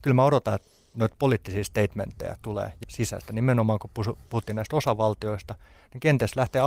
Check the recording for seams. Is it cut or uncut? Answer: cut